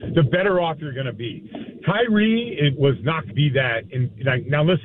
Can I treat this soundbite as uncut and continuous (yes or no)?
no